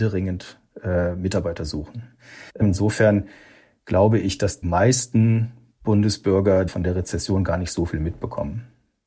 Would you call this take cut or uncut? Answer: cut